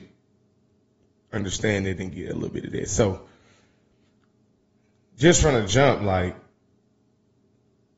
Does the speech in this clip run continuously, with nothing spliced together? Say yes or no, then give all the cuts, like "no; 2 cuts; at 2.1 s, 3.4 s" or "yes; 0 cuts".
yes; 0 cuts